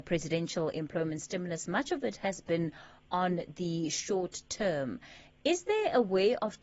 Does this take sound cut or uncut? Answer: uncut